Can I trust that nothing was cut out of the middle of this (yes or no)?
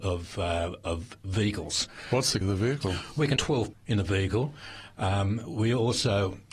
no